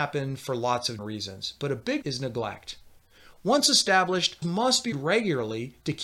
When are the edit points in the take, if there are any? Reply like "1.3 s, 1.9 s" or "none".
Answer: 1.0 s, 2.0 s, 4.4 s, 4.9 s